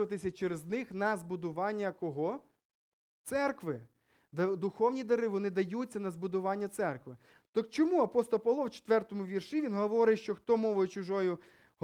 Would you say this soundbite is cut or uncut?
uncut